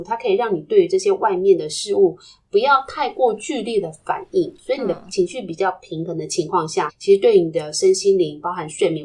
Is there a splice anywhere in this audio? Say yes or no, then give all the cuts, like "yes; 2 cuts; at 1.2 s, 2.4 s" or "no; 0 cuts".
yes; 1 cut; at 6.9 s